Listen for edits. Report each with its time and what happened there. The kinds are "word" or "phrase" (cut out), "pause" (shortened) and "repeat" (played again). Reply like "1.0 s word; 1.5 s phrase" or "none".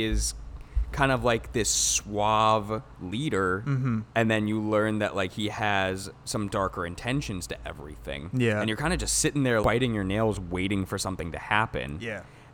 2.9 s pause; 9.6 s word